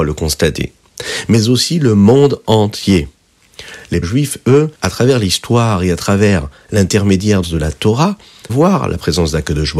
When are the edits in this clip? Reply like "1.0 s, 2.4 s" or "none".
4.0 s, 4.7 s, 7.4 s, 8.5 s